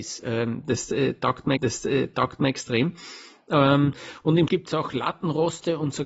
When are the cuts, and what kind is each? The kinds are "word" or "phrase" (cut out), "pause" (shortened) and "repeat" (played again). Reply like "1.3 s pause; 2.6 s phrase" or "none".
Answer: 1.6 s repeat; 4.5 s word